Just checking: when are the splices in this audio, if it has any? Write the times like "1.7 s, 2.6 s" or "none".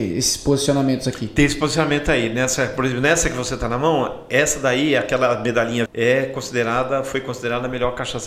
5.9 s